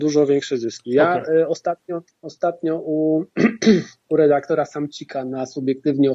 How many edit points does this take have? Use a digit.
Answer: 1